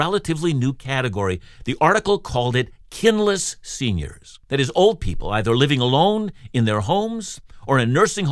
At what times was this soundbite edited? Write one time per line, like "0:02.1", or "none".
0:04.4